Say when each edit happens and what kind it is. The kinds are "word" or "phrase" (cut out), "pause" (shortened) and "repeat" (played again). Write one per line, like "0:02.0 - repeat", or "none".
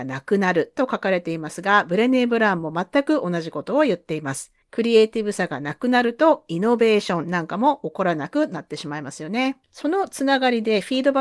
0:04.6 - pause
0:09.6 - pause